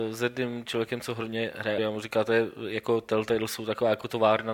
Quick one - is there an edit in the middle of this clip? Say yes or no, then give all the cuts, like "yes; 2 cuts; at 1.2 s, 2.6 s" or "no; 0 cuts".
yes; 1 cut; at 1.8 s